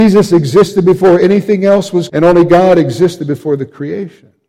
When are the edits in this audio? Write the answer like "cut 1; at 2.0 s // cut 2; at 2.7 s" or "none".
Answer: cut 1; at 2.1 s